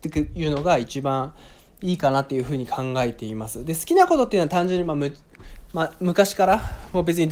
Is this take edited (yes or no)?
no